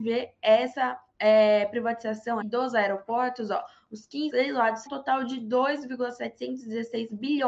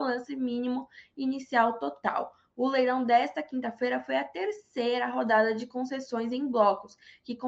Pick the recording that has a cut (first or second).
first